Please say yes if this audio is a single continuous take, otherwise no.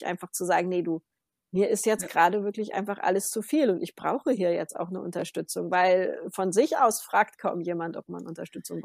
yes